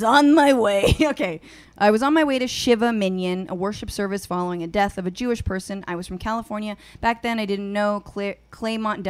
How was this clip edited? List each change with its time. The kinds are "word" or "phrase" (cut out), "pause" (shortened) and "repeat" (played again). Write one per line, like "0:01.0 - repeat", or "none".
none